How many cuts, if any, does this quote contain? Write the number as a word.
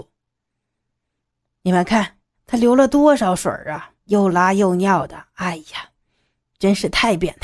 two